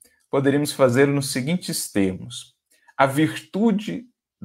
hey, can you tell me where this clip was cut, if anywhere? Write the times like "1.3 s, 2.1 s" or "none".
none

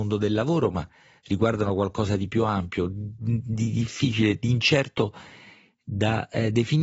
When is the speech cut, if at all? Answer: none

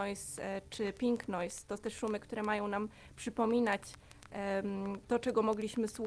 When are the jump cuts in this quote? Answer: 1.8 s

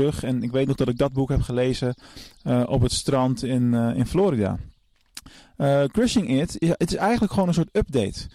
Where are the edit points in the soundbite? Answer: none

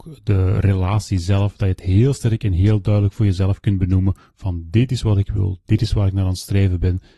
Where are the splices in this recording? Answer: none

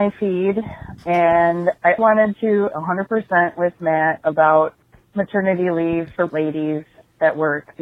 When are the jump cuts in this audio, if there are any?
2.0 s, 2.7 s, 6.3 s

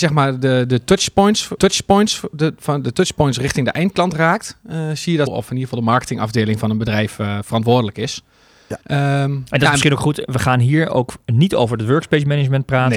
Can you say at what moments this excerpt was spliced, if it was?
1.6 s, 5.3 s, 8.8 s

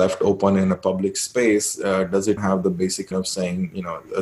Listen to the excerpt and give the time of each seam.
2.4 s, 3.1 s

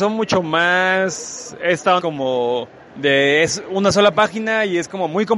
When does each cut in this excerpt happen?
2.0 s

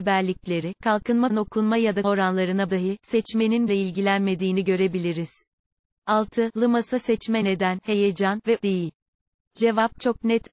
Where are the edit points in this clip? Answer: 1.3 s, 2.0 s, 2.7 s, 3.7 s, 7.4 s, 8.6 s

